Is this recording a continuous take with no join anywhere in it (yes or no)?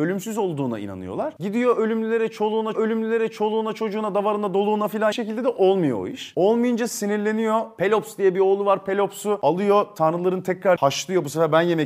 no